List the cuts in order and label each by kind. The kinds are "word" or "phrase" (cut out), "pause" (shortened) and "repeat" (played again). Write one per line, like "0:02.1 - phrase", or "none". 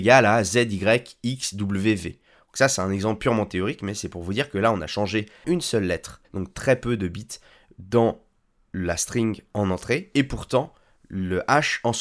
0:05.4 - word
0:06.2 - pause